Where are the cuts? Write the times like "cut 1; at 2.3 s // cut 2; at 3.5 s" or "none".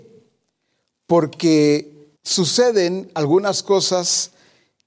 cut 1; at 2.2 s